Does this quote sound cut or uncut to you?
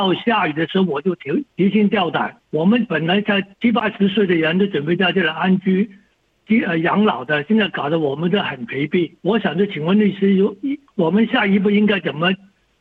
cut